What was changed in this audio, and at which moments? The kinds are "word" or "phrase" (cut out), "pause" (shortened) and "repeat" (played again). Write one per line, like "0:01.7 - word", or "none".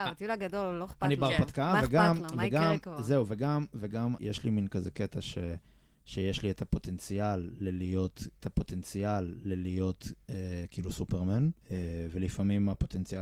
0:04.2 - word
0:08.4 - repeat
0:11.6 - pause